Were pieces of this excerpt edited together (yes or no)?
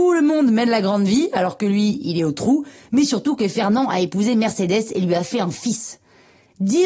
no